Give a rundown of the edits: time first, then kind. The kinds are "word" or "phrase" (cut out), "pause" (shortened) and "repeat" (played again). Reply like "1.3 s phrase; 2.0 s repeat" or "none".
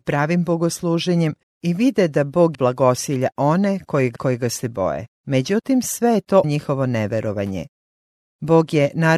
1.4 s pause; 2.5 s word; 4.2 s phrase; 5.1 s pause; 6.4 s word